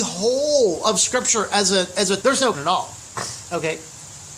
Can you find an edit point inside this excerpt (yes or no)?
yes